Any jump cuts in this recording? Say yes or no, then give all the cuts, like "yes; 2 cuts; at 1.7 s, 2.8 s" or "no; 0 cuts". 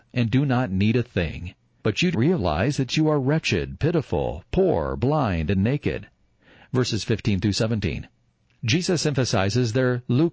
yes; 1 cut; at 2.1 s